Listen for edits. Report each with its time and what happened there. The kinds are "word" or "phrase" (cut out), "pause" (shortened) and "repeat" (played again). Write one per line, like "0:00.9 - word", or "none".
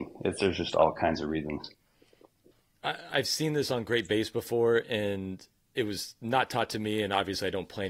none